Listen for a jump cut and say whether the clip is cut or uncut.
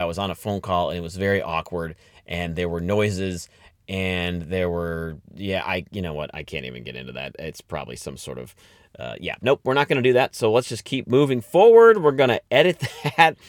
uncut